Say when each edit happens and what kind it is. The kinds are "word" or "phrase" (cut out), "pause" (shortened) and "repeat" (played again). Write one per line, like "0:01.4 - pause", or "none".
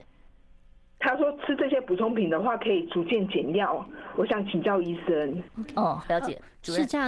0:06.0 - word

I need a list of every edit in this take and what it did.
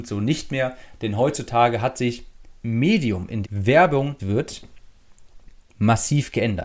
0:02.6 - word
0:03.4 - word
0:04.2 - word

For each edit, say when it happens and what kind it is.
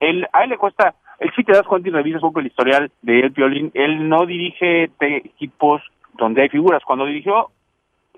0:02.2 - word
0:03.0 - pause
0:05.2 - word

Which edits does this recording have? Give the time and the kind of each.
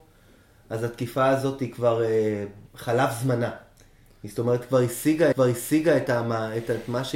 0:02.7 - pause
0:05.3 - repeat

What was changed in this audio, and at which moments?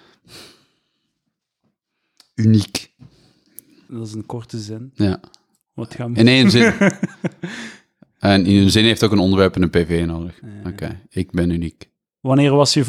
none

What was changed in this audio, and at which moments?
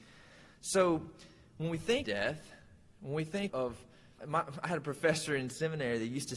0:02.0 - word
0:03.5 - word
0:04.2 - word

